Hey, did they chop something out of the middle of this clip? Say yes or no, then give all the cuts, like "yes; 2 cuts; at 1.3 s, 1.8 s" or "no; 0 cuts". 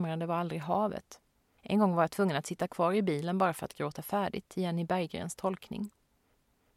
no; 0 cuts